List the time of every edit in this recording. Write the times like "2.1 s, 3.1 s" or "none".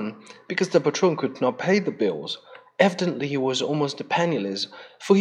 none